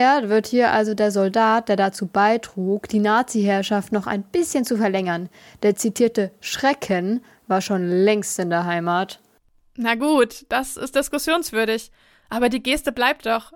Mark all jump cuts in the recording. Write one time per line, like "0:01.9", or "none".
none